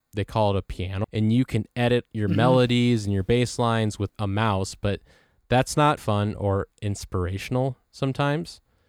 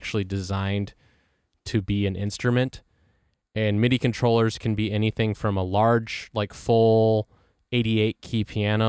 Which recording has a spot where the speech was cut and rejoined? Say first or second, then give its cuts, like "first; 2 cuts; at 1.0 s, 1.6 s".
first; 4 cuts; at 1.0 s, 4.1 s, 6.0 s, 6.7 s